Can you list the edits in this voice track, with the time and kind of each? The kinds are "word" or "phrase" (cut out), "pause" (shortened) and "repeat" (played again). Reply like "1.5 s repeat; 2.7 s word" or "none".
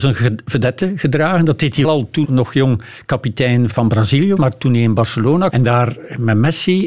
1.8 s word; 2.2 s word; 3.7 s word; 4.4 s word; 5.5 s word